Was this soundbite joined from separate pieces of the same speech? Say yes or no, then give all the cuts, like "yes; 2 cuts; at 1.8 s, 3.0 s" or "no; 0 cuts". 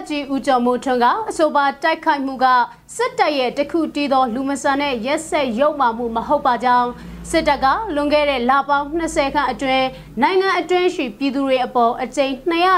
no; 0 cuts